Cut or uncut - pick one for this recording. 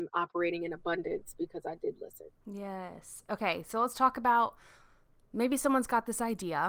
uncut